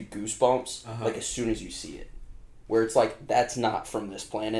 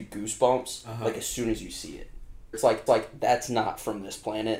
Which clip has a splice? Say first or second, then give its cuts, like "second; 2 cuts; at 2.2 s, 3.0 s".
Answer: second; 2 cuts; at 2.5 s, 2.9 s